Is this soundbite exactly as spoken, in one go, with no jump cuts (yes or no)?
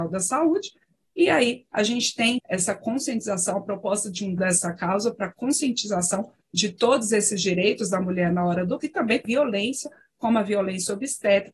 no